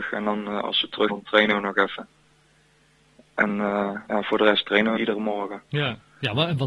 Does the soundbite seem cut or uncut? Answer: cut